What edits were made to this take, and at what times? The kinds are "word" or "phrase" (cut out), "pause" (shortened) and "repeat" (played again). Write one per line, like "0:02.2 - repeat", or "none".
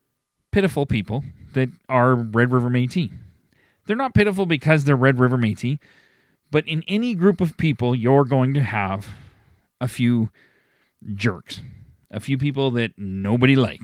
none